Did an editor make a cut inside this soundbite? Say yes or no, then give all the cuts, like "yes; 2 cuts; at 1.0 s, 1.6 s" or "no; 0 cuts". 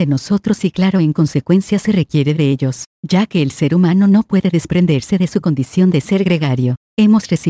no; 0 cuts